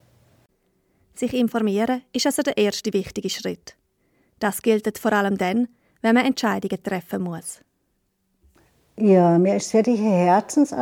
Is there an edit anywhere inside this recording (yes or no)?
no